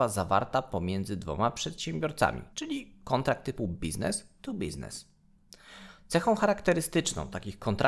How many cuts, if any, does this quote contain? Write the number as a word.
one